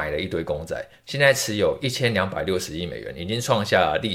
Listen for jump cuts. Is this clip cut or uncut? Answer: uncut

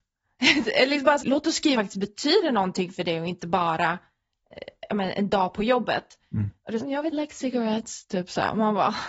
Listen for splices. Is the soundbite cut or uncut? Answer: cut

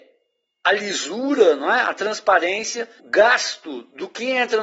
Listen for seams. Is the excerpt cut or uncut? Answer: cut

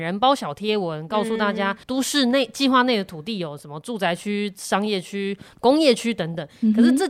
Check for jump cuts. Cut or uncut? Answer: cut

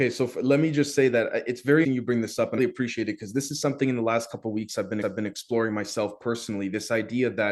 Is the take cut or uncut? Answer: cut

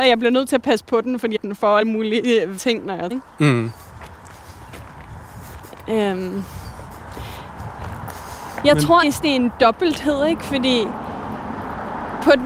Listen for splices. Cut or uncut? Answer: cut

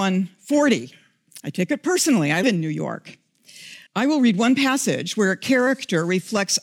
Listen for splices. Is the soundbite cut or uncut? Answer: cut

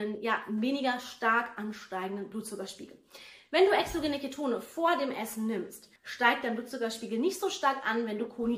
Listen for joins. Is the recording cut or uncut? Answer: cut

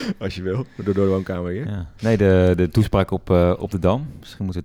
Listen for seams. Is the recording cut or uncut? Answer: uncut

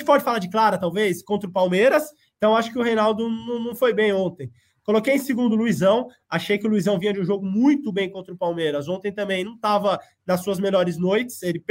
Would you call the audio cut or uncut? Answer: uncut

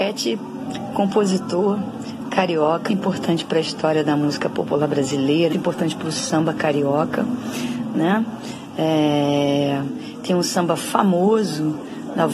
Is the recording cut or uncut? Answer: cut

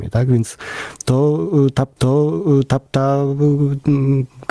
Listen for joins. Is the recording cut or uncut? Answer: cut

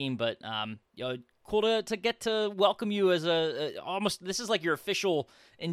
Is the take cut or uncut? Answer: uncut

